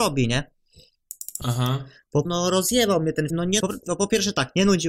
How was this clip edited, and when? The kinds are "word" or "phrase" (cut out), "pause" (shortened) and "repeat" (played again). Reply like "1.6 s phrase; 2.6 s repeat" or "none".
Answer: 2.3 s word; 3.3 s word; 3.6 s word